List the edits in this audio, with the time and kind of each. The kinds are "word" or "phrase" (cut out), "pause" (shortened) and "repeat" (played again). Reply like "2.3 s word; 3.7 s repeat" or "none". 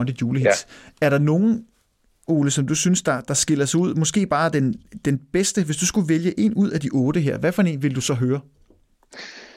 none